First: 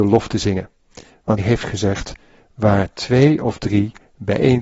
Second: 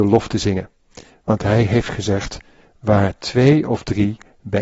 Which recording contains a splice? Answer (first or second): first